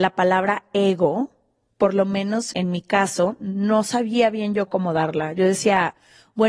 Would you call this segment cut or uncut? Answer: cut